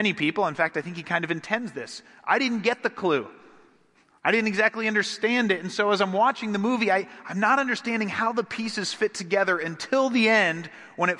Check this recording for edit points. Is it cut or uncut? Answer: uncut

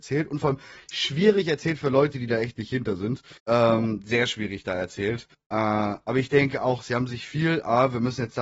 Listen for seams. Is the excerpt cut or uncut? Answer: cut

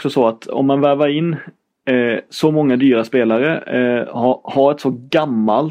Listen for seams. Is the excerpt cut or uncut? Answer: uncut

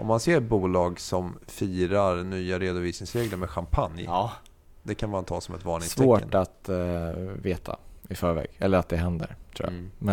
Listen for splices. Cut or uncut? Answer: uncut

